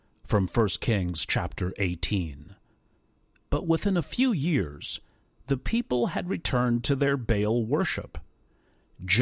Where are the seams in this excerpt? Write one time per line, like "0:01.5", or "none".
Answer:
none